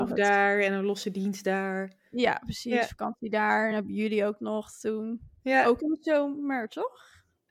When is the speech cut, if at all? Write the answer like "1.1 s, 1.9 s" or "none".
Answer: none